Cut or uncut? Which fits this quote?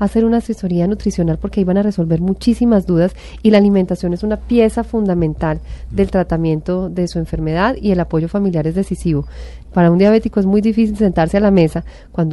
uncut